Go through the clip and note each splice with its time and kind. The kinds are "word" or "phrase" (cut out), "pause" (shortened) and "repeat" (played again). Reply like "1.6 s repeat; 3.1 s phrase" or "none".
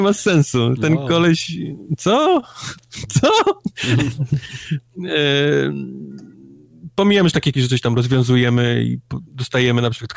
7.5 s word; 9.3 s pause